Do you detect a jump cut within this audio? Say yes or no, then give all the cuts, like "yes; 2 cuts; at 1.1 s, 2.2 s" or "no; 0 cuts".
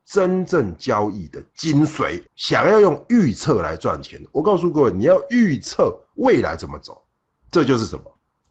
yes; 1 cut; at 2.3 s